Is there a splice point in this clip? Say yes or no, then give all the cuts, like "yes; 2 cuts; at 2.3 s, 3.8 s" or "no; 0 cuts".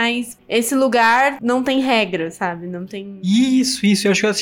no; 0 cuts